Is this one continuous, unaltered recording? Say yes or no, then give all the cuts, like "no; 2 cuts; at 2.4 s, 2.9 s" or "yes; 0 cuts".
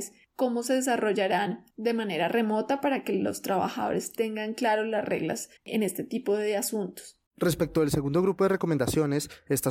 no; 3 cuts; at 1.7 s, 5.6 s, 7.3 s